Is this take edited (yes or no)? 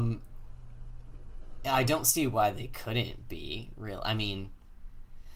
no